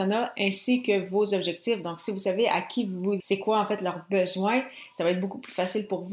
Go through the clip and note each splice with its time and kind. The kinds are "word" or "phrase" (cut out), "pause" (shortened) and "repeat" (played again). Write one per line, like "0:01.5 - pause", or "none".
0:03.2 - word